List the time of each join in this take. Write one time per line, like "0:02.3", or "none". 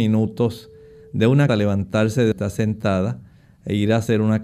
0:01.5
0:02.3